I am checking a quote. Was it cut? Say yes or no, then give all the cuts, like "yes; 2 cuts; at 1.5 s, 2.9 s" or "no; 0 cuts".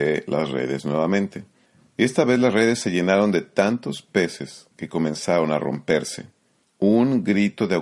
yes; 3 cuts; at 1.7 s, 4.7 s, 6.6 s